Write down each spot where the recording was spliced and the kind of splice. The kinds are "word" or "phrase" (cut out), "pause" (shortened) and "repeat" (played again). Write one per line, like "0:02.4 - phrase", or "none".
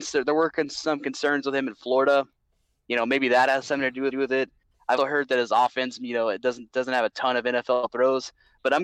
0:04.1 - repeat
0:05.0 - word